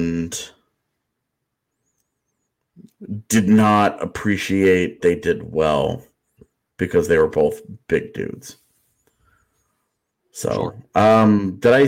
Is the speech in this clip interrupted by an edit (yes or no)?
yes